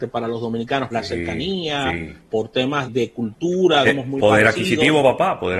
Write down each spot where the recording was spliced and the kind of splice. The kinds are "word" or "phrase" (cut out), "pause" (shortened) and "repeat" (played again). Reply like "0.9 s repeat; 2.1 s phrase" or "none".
0.9 s word; 2.9 s word; 3.8 s word